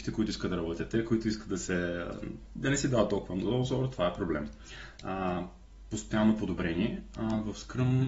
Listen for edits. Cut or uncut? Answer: uncut